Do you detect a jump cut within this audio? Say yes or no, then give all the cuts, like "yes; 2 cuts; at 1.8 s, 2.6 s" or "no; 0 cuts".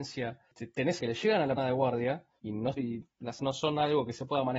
yes; 4 cuts; at 1.0 s, 1.6 s, 2.8 s, 3.4 s